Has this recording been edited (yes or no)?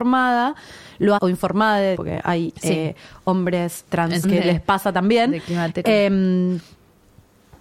yes